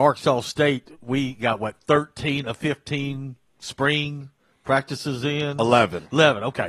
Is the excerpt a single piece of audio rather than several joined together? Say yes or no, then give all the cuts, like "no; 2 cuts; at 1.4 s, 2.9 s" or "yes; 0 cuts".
yes; 0 cuts